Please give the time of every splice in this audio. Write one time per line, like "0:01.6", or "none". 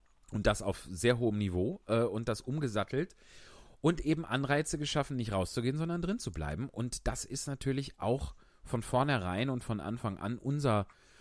none